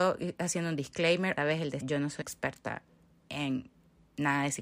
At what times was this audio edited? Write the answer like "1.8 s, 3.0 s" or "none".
1.4 s, 1.8 s, 2.2 s